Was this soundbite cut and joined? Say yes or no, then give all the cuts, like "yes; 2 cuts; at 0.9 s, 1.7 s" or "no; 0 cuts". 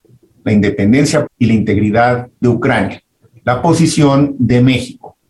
yes; 2 cuts; at 1.3 s, 2.4 s